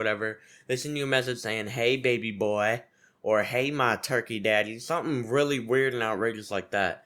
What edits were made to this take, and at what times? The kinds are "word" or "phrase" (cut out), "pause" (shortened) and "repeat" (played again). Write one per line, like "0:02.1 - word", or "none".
none